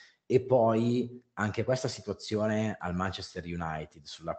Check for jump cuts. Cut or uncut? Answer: uncut